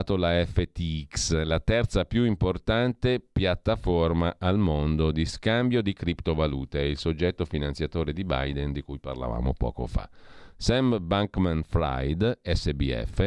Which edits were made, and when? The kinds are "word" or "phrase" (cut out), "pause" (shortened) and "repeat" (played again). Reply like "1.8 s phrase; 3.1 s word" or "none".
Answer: none